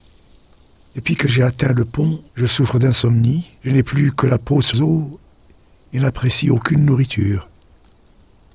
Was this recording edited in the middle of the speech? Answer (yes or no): yes